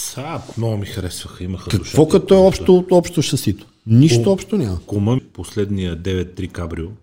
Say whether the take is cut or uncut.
cut